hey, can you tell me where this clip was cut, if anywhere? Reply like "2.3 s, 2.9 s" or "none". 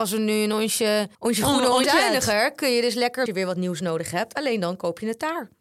1.1 s, 1.8 s, 3.3 s